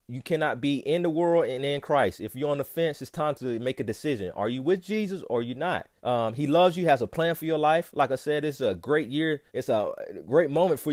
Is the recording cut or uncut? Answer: cut